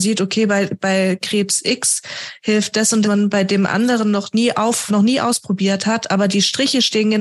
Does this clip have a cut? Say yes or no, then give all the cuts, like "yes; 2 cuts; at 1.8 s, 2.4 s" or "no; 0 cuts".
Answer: yes; 2 cuts; at 3.0 s, 4.9 s